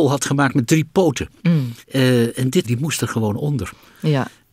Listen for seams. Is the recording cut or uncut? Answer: cut